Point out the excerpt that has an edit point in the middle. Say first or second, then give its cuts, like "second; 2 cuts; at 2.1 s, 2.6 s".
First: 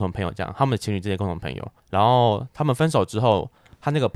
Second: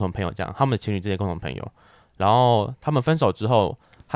first; 1 cut; at 1.8 s